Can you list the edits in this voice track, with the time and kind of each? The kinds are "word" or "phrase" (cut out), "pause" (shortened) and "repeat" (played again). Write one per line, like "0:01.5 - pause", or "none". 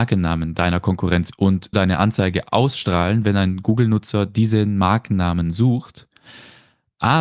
0:01.3 - word
0:01.7 - word